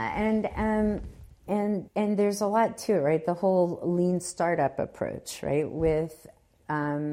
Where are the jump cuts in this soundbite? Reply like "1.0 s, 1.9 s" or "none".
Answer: 1.9 s